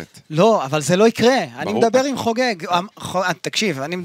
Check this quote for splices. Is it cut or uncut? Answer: uncut